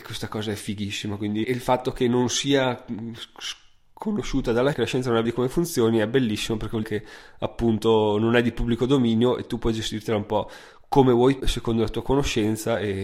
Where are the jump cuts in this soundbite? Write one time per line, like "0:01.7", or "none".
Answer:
0:01.4
0:04.7
0:05.2
0:06.8
0:11.4